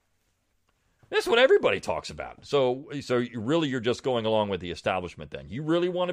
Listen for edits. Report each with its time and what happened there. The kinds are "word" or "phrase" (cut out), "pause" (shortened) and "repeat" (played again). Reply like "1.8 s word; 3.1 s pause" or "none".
none